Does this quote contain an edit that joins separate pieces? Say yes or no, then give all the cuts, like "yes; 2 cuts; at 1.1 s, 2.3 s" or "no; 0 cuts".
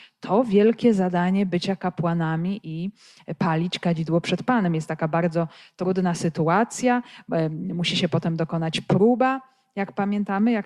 no; 0 cuts